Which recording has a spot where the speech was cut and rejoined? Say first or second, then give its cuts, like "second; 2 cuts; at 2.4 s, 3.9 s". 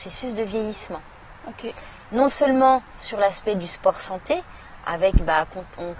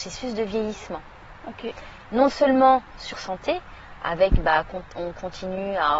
second; 1 cut; at 3.1 s